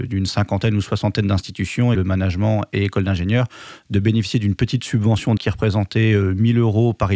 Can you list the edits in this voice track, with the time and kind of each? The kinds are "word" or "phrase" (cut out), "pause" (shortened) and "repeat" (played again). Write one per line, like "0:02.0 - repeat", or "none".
0:01.9 - word
0:05.4 - word